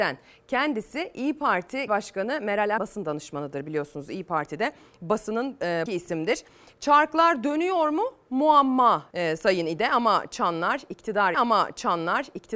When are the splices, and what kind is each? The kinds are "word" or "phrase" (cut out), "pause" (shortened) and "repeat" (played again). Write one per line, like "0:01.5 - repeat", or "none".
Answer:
0:01.9 - word
0:02.8 - word
0:05.9 - word
0:09.1 - word
0:11.3 - repeat